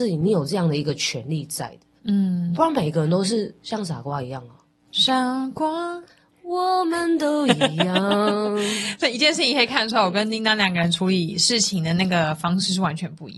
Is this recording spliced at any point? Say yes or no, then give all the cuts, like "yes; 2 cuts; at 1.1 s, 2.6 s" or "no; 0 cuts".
yes; 1 cut; at 2.5 s